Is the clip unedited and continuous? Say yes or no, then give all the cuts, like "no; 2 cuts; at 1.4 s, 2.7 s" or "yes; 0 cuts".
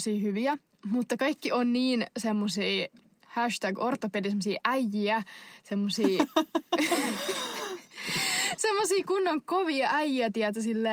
yes; 0 cuts